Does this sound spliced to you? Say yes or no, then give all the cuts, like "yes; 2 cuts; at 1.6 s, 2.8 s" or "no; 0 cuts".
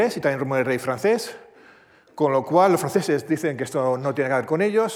no; 0 cuts